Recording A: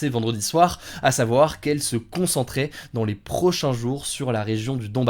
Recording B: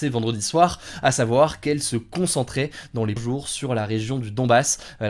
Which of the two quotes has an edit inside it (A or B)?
B